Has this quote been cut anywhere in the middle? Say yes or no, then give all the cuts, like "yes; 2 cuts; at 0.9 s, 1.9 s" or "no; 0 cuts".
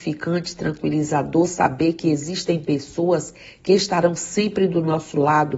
no; 0 cuts